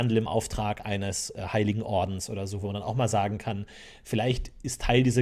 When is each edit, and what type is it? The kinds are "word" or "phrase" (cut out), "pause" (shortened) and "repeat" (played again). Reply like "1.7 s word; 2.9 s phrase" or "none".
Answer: none